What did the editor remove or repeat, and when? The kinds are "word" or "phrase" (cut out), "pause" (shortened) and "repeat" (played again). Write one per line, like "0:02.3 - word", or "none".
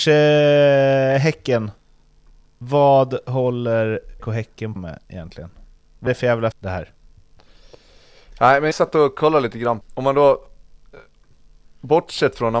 0:04.2 - word
0:04.8 - word
0:06.1 - word
0:06.5 - word
0:08.7 - word
0:09.8 - word